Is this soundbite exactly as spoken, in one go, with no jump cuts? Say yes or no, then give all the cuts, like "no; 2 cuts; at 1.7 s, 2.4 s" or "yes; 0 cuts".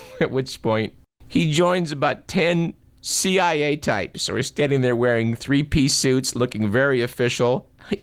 yes; 0 cuts